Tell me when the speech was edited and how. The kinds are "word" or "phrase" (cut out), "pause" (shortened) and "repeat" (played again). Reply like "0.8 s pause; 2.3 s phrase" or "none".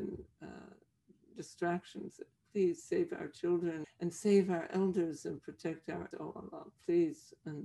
3.8 s word; 6.1 s word